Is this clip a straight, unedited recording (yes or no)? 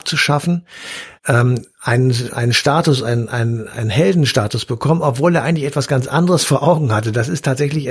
no